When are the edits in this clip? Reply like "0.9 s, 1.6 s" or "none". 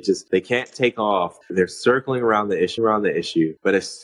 1.4 s, 2.8 s